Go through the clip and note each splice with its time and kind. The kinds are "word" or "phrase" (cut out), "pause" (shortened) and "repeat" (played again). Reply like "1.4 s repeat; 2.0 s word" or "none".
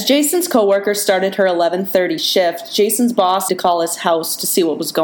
3.5 s word

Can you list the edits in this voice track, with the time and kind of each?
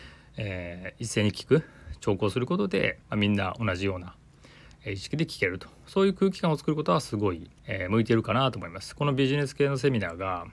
3.0 s pause; 7.6 s pause

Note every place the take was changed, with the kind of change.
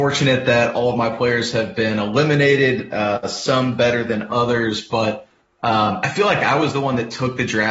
none

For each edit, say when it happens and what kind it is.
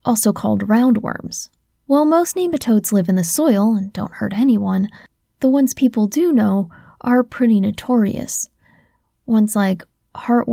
none

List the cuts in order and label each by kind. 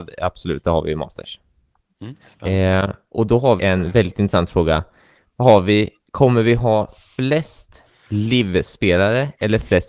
2.2 s pause; 3.6 s word

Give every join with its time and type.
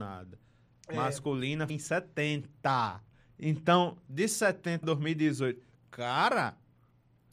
1.7 s word; 3.1 s pause; 4.8 s word

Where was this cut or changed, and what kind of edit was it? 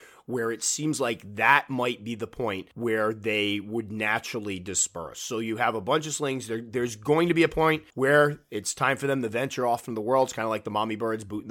2.7 s pause; 7.9 s pause

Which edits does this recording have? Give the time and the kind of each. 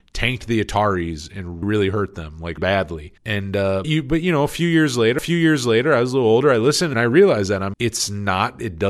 1.6 s word; 2.6 s word; 3.2 s pause; 3.8 s word; 5.2 s repeat; 6.9 s phrase; 7.7 s word

